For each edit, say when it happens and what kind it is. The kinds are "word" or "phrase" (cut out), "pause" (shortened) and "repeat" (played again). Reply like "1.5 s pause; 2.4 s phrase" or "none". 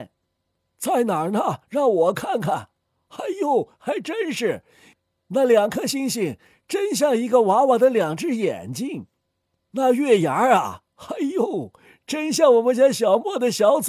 none